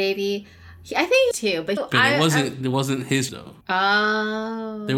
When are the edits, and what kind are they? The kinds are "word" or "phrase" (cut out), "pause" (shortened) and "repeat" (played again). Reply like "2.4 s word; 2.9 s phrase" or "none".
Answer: 1.3 s phrase; 1.8 s word; 2.6 s word; 3.3 s word; 3.6 s pause